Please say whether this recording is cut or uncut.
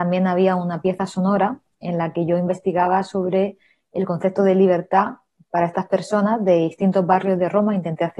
uncut